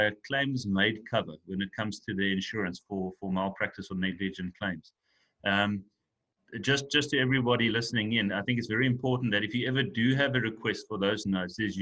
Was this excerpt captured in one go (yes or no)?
yes